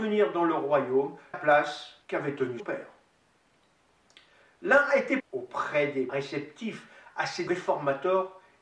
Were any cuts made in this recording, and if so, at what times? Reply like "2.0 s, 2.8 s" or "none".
1.3 s, 2.0 s, 2.6 s, 5.2 s, 6.1 s, 7.5 s